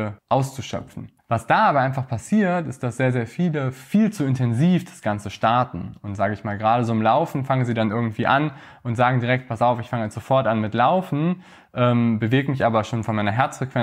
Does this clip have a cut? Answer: no; 0 cuts

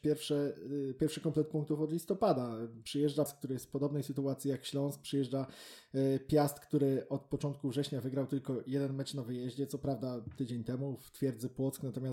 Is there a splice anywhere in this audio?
yes; 1 cut; at 3.3 s

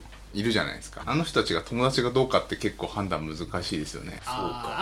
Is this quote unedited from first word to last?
no; 1 cut; at 1.0 s

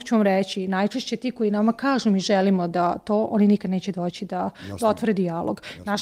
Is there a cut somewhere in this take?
no; 0 cuts

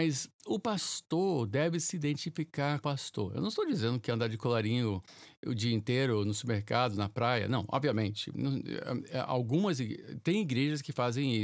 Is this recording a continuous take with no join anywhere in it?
no; 1 cut; at 2.8 s

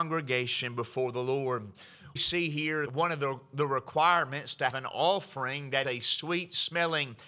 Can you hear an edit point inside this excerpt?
yes; 4 cuts; at 2.2 s, 2.9 s, 4.7 s, 5.8 s

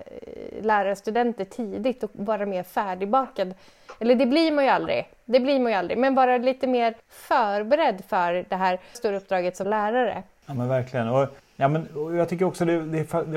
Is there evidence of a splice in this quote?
yes; 4 cuts; at 7.0 s, 8.9 s, 9.6 s, 11.4 s

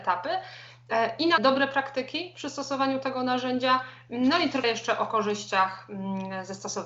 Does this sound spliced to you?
yes; 2 cuts; at 1.4 s, 4.6 s

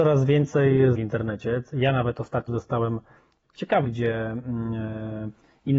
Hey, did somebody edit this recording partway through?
yes; 4 cuts; at 0.9 s, 2.5 s, 3.4 s, 3.8 s

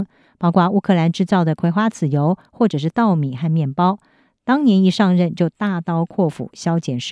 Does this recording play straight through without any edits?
yes; 0 cuts

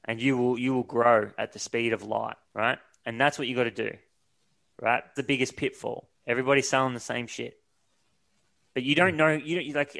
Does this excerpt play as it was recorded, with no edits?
no; 3 cuts; at 2.4 s, 5.2 s, 6.1 s

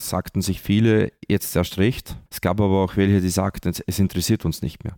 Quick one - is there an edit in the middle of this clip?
yes; 1 cut; at 2.3 s

